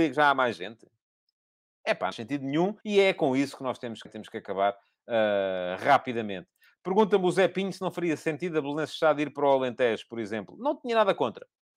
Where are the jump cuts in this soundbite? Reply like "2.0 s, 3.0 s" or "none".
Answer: 2.1 s, 2.8 s, 4.1 s